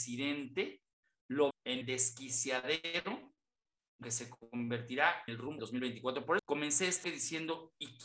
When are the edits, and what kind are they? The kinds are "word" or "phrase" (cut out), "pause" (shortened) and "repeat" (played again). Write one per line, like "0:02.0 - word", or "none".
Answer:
0:01.5 - word
0:01.8 - word
0:04.0 - word
0:05.3 - word
0:05.6 - word
0:06.4 - word
0:07.0 - word